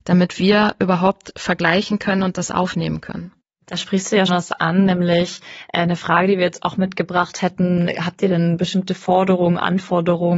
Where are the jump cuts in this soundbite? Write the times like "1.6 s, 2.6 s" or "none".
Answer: 4.3 s